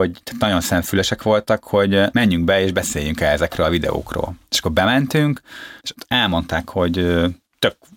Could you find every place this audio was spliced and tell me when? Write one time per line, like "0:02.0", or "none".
0:05.8